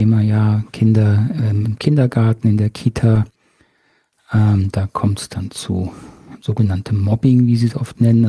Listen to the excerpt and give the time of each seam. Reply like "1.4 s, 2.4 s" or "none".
1.6 s, 6.4 s